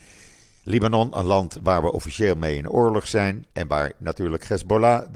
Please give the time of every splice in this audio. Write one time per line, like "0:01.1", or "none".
0:03.5